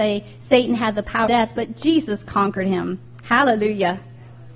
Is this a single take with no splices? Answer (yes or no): no